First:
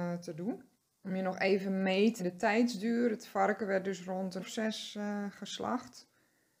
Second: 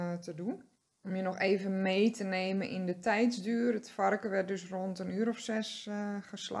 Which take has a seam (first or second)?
first